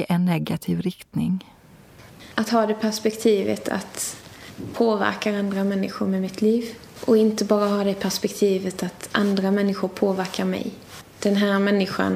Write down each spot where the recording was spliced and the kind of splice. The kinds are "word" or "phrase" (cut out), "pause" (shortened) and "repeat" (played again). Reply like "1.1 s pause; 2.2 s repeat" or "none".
4.7 s word